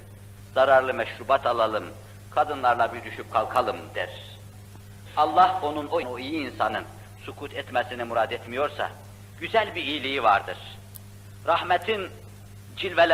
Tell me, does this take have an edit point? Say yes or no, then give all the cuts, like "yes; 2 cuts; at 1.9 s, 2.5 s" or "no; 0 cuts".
yes; 1 cut; at 6.0 s